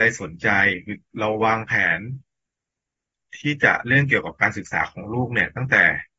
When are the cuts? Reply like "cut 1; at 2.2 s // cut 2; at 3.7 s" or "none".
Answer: none